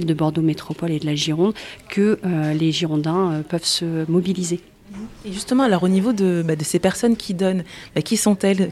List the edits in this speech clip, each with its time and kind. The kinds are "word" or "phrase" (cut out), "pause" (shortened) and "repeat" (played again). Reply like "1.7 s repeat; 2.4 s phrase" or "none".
none